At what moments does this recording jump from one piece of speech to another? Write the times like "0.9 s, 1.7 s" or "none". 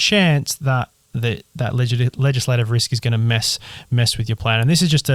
none